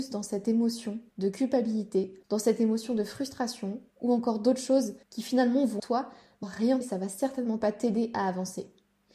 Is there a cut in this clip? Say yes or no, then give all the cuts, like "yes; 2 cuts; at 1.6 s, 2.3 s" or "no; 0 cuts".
yes; 7 cuts; at 1.1 s, 2.2 s, 3.9 s, 5.0 s, 5.8 s, 6.4 s, 6.8 s